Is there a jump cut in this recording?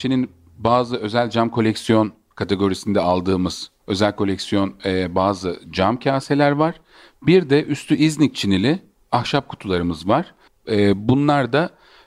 no; 0 cuts

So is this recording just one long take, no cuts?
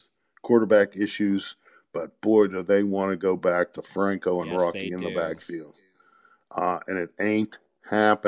yes; 0 cuts

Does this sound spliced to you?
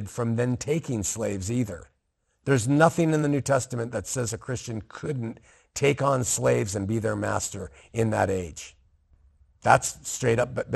no; 0 cuts

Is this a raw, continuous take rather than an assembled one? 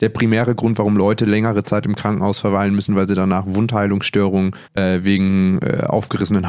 no; 1 cut; at 4.6 s

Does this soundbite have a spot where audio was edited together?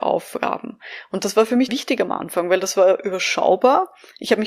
yes; 1 cut; at 1.7 s

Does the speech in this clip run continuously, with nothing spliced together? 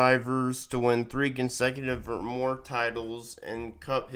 yes; 0 cuts

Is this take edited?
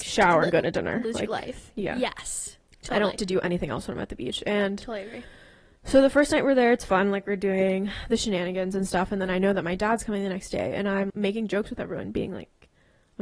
yes; 2 cuts; at 3.2 s, 11.1 s

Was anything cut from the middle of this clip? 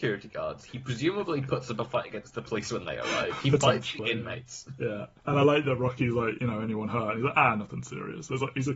no; 0 cuts

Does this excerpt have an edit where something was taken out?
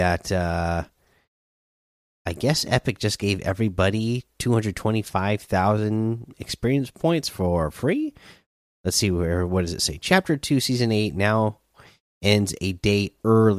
no; 0 cuts

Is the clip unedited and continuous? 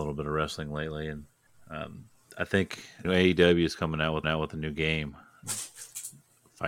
no; 4 cuts; at 1.5 s, 3.0 s, 4.2 s, 5.4 s

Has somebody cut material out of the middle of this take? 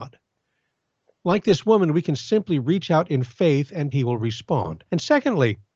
yes; 2 cuts; at 3.9 s, 4.9 s

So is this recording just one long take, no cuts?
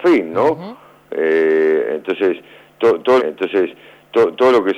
no; 1 cut; at 3.2 s

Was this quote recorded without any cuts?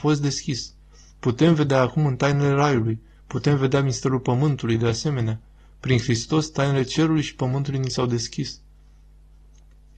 yes; 0 cuts

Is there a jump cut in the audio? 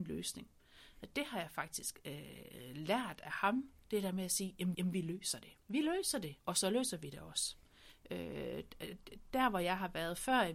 yes; 3 cuts; at 4.7 s, 5.6 s, 6.4 s

